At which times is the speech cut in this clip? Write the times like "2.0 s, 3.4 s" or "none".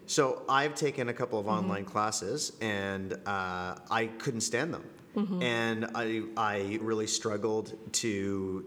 6.8 s